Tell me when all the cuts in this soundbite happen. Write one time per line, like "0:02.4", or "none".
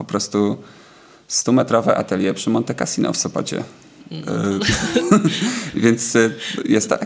none